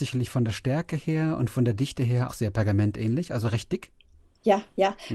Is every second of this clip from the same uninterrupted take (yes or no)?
no